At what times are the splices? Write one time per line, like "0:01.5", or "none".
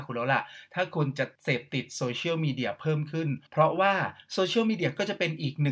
0:03.5

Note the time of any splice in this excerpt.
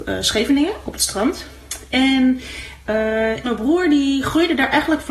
0:03.4

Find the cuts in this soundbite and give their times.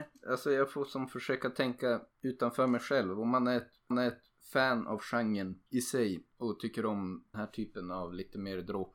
0:02.1
0:03.9
0:05.7
0:07.3

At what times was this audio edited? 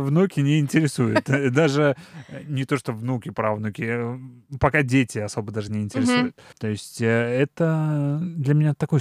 none

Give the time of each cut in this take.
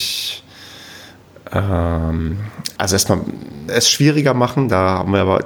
0:02.8
0:03.7

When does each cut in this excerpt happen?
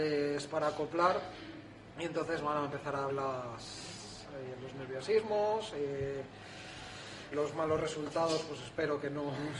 0:03.1
0:07.3

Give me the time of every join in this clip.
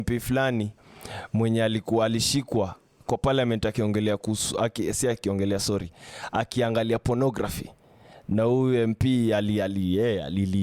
none

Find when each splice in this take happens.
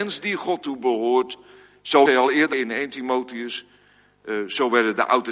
0:02.1
0:02.5

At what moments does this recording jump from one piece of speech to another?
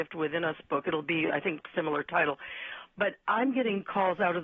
none

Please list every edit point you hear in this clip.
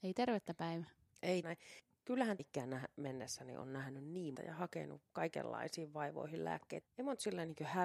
0:01.4
0:02.4
0:04.4
0:06.8

